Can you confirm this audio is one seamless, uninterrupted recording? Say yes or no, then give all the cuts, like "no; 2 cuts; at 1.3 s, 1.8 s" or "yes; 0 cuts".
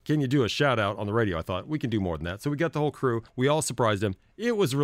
no; 1 cut; at 3.3 s